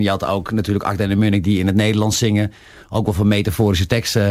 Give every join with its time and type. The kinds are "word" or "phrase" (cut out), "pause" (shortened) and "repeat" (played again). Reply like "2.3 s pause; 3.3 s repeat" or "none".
none